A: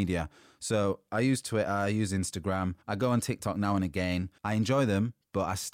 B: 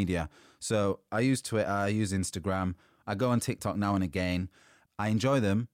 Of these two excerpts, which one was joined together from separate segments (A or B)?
A